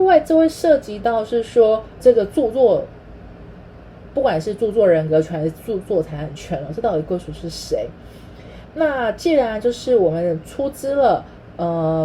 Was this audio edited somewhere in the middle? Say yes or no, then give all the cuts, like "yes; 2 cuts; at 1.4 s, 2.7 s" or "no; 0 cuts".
yes; 1 cut; at 2.0 s